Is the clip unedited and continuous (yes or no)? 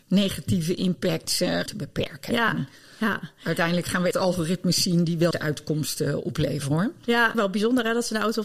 no